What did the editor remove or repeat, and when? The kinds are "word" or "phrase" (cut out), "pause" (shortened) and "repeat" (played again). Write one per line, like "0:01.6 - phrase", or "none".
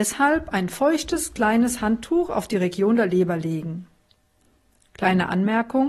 none